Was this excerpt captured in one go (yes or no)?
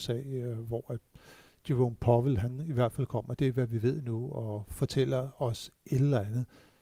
yes